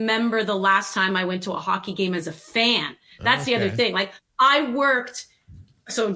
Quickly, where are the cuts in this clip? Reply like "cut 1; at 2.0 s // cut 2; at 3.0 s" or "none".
none

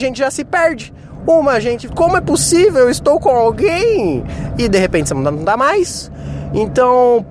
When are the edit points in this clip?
cut 1; at 1.9 s

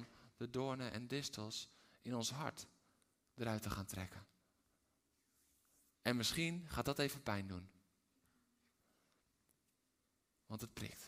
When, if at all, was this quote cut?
none

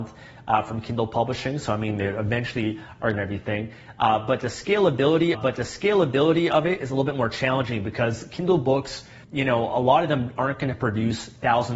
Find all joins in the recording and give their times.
cut 1; at 3.1 s // cut 2; at 5.3 s // cut 3; at 9.2 s

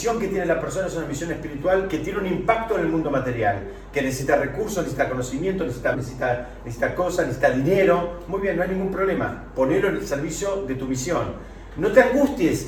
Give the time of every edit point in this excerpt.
cut 1; at 5.9 s

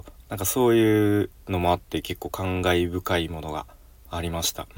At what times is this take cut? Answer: cut 1; at 1.4 s

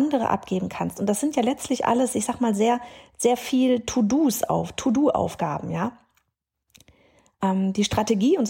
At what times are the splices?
none

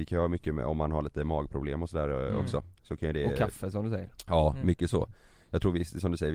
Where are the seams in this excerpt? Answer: none

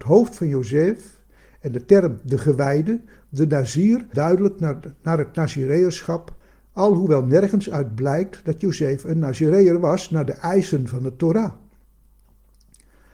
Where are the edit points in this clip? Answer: cut 1; at 4.1 s

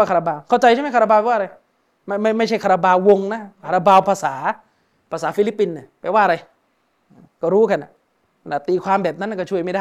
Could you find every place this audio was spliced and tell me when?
cut 1; at 3.6 s

